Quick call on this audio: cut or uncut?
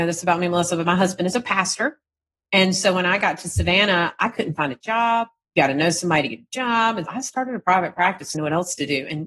cut